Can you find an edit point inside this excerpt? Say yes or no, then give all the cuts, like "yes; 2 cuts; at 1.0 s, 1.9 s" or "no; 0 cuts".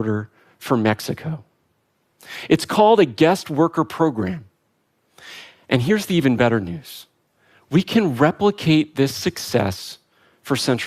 no; 0 cuts